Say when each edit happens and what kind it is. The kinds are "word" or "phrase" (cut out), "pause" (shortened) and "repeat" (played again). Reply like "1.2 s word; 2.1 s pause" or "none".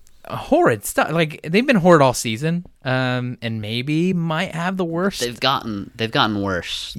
none